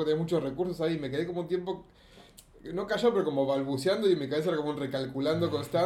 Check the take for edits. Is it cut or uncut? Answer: uncut